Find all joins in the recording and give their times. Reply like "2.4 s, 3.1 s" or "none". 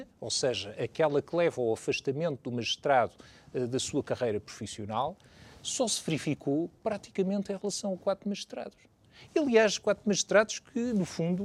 none